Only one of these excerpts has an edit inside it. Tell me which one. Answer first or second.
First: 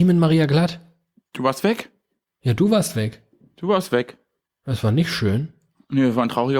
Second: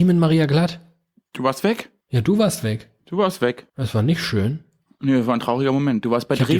second